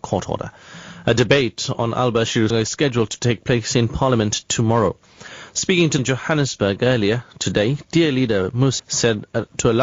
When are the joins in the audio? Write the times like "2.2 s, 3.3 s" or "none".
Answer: 2.5 s, 6.0 s, 8.8 s